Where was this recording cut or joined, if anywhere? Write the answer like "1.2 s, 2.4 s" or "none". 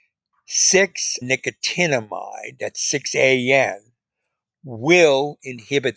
1.2 s